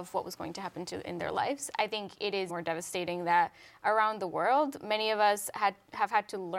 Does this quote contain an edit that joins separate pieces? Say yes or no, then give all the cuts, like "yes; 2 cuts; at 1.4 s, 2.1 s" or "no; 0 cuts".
yes; 1 cut; at 2.5 s